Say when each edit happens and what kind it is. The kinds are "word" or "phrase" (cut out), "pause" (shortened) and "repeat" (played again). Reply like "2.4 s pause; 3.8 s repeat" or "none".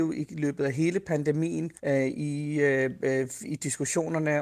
1.8 s pause